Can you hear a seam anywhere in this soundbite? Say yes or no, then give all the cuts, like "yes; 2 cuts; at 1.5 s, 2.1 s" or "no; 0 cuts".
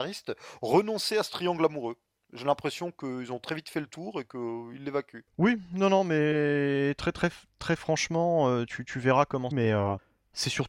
yes; 1 cut; at 9.5 s